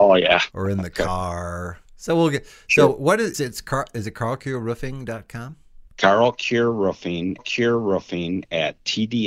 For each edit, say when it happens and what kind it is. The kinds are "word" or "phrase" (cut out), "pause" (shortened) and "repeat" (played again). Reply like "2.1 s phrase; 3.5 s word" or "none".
3.3 s word; 5.9 s pause; 7.4 s repeat